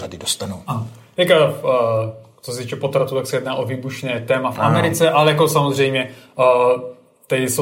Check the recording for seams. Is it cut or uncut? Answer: uncut